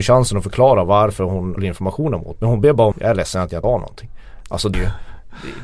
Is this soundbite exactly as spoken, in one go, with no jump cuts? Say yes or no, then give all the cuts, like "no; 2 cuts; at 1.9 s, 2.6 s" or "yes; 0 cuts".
no; 5 cuts; at 1.6 s, 2.4 s, 2.9 s, 3.6 s, 4.7 s